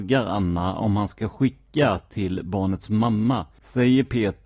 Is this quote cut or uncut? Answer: uncut